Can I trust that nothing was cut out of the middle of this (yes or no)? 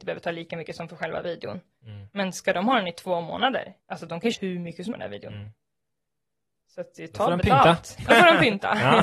no